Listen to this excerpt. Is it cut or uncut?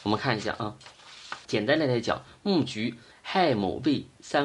cut